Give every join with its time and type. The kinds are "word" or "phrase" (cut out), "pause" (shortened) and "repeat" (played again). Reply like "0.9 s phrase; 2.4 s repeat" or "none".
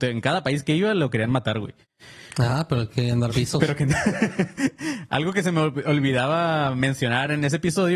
3.3 s word